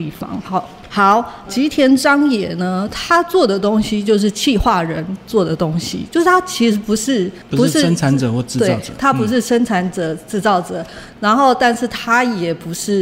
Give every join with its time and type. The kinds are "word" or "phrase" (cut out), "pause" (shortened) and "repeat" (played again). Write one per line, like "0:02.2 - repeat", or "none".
0:01.5 - phrase